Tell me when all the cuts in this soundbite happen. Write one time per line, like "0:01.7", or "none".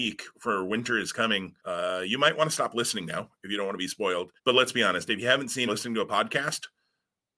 0:01.6
0:04.4
0:05.7

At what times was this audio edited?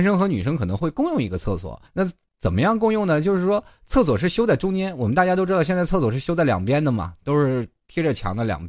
0:01.9

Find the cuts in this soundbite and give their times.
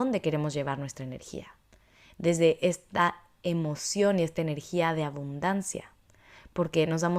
none

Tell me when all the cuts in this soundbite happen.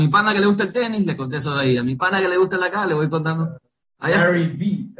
none

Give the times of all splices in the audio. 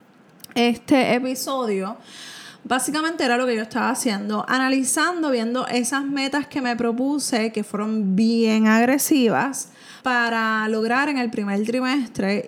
0:10.0

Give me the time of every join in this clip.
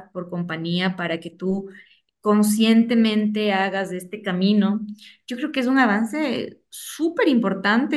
none

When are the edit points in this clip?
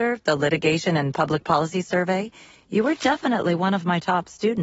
none

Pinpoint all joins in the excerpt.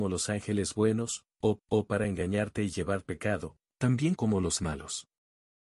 0:01.6
0:03.0
0:04.2
0:04.6

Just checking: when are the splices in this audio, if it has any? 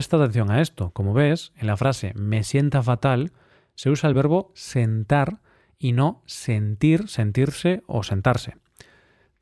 none

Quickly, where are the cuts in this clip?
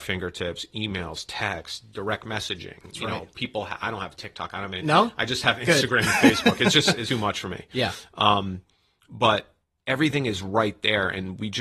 0:07.0

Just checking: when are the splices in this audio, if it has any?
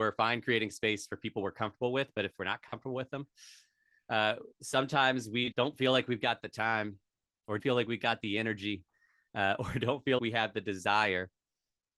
0:04.5
0:05.5
0:07.6
0:10.2

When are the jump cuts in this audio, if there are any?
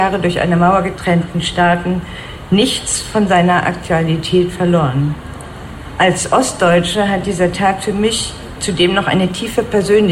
none

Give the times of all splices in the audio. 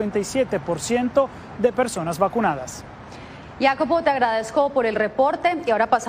none

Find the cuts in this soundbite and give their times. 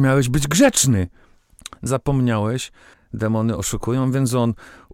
0:01.9
0:02.9

